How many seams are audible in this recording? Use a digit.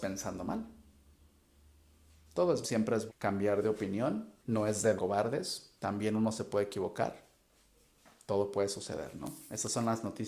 5